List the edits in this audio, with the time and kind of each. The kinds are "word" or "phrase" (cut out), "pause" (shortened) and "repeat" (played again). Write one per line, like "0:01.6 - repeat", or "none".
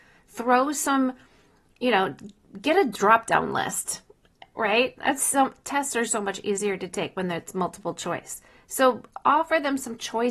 none